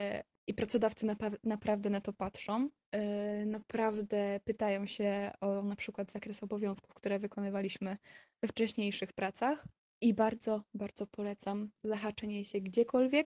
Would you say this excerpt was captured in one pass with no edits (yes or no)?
no